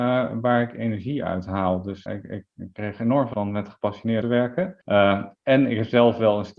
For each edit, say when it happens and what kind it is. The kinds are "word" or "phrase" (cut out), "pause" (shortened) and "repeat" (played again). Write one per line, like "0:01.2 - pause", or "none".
0:02.1 - word
0:03.3 - word
0:04.2 - word
0:04.8 - pause